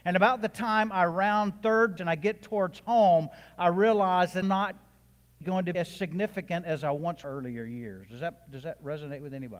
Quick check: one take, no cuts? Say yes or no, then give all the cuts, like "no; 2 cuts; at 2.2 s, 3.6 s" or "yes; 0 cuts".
no; 5 cuts; at 2.0 s, 4.4 s, 5.4 s, 5.7 s, 7.2 s